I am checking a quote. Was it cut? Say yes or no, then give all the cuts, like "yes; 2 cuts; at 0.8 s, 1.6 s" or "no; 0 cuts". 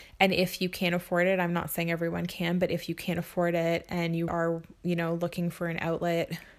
yes; 1 cut; at 4.3 s